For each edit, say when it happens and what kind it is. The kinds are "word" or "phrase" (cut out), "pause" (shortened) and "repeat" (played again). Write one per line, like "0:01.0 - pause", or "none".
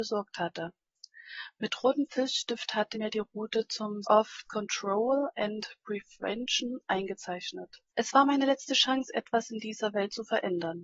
0:02.9 - word
0:04.0 - phrase
0:04.4 - word
0:07.9 - pause

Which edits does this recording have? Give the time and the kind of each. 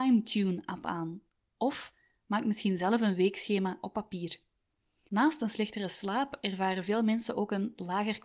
none

